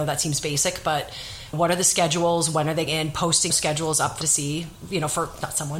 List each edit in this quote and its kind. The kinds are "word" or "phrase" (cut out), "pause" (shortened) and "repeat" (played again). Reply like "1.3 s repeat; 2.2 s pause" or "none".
1.5 s phrase; 2.9 s word; 3.5 s word; 4.2 s word